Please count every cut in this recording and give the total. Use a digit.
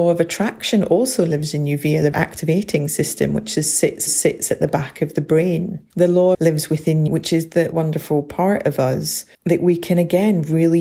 7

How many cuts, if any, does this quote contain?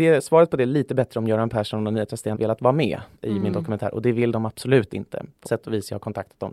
3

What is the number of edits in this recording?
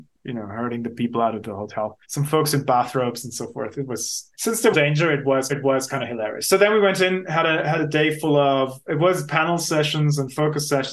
4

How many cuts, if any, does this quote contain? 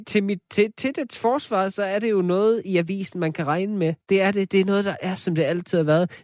1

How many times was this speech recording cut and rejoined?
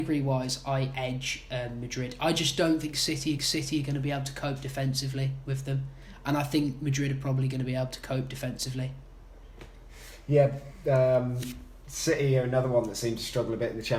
1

